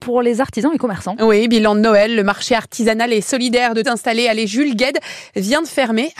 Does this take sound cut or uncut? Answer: cut